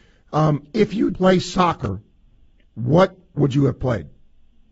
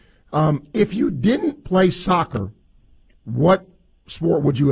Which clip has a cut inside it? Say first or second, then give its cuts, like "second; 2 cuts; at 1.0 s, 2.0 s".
first; 2 cuts; at 1.1 s, 3.4 s